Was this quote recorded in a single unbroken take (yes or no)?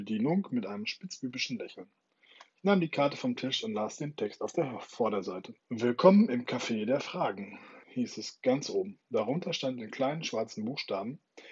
no